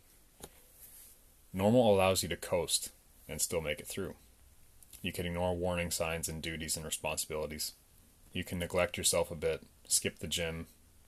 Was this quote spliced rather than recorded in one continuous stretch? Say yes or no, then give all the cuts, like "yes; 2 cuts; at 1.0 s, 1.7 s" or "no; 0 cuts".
no; 0 cuts